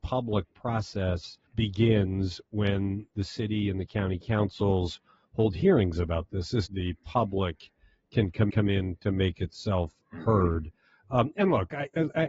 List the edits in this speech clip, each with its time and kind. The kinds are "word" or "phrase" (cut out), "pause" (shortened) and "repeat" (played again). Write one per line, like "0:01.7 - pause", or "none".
0:01.5 - pause
0:06.6 - phrase
0:08.5 - repeat